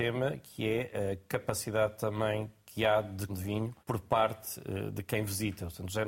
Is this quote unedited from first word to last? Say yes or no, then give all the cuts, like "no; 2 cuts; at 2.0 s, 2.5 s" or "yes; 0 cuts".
no; 2 cuts; at 3.3 s, 3.8 s